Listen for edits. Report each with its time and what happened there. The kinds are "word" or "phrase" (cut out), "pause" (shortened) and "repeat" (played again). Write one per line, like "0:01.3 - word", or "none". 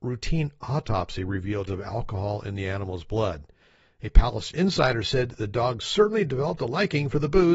0:01.7 - word